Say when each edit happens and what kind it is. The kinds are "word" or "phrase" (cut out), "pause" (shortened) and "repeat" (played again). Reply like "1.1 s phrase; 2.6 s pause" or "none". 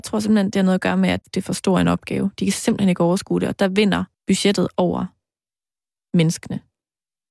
1.2 s word; 4.1 s pause